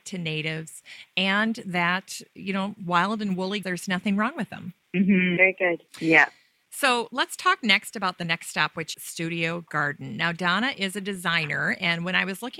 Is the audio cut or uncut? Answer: cut